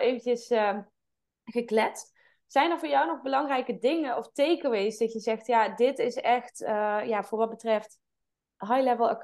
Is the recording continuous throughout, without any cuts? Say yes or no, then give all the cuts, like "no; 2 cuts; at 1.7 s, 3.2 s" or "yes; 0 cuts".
yes; 0 cuts